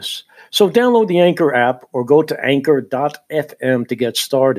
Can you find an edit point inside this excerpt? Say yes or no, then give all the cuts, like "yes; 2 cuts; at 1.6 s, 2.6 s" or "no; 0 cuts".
no; 0 cuts